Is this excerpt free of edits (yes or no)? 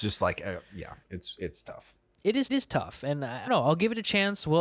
no